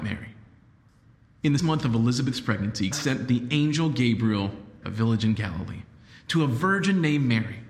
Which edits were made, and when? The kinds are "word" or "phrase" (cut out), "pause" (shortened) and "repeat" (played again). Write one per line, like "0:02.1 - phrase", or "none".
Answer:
0:01.6 - word
0:02.9 - word
0:04.8 - phrase